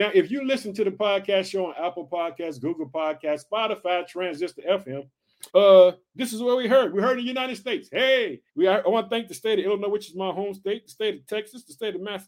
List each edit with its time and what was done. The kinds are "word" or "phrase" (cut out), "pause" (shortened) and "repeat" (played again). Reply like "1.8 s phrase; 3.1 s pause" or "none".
5.5 s pause; 8.5 s pause